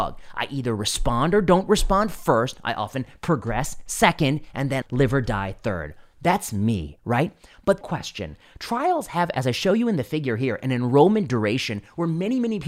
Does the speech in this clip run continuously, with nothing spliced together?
no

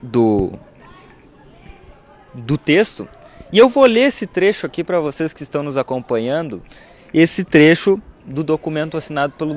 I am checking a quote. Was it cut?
no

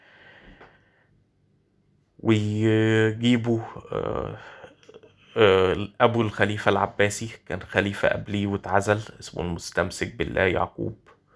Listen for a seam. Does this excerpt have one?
no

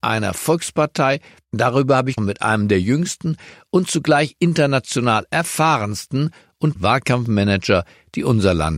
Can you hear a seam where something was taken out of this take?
yes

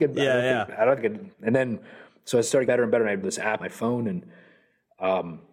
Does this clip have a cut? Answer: yes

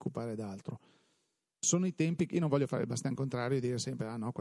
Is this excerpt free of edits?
yes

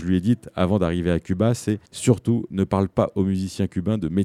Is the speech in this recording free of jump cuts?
no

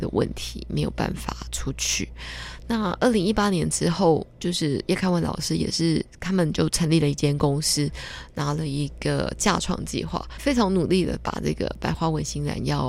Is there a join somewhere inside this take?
yes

